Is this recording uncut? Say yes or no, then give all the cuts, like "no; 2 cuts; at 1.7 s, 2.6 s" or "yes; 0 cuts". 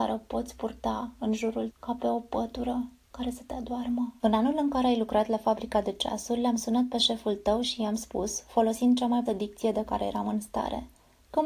no; 2 cuts; at 1.7 s, 9.3 s